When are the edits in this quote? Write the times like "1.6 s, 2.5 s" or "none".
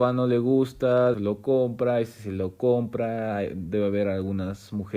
1.1 s